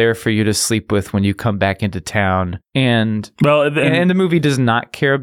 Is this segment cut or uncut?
cut